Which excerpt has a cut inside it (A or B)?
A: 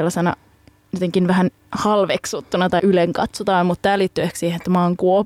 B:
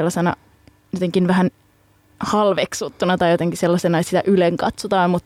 A